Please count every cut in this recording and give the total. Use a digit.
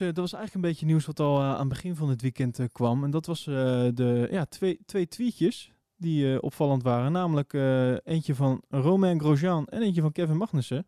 0